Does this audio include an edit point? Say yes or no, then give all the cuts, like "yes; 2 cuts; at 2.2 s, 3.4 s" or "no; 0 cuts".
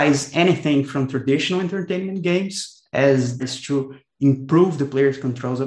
yes; 1 cut; at 3.4 s